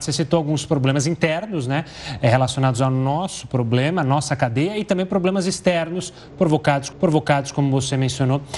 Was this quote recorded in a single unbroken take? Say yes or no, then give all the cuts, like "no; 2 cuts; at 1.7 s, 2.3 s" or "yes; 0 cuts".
no; 1 cut; at 6.9 s